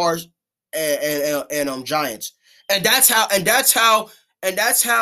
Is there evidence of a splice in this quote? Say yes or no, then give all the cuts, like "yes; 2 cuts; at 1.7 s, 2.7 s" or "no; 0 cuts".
no; 0 cuts